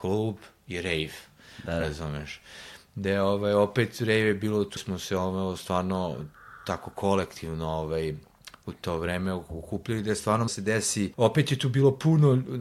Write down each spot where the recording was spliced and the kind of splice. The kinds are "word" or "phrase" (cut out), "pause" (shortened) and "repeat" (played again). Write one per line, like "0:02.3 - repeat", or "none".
0:04.8 - word
0:10.5 - phrase
0:11.1 - word